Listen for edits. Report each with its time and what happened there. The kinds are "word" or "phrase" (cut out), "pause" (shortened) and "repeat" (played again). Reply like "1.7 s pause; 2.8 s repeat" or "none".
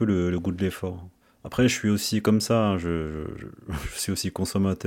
1.2 s pause